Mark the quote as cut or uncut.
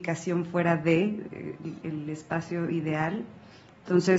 cut